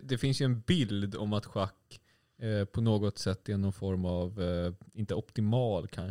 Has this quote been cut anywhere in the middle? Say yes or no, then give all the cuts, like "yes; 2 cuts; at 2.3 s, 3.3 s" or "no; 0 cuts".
no; 0 cuts